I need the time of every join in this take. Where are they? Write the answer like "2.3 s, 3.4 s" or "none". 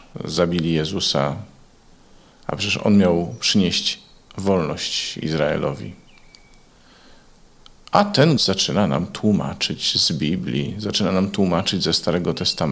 8.4 s